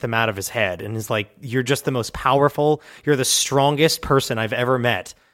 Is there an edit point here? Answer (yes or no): no